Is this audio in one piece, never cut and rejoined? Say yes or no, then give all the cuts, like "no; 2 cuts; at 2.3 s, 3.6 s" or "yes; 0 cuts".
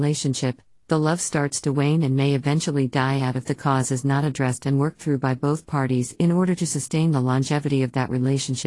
yes; 0 cuts